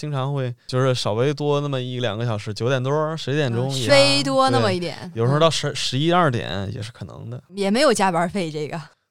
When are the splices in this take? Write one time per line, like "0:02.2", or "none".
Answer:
0:03.9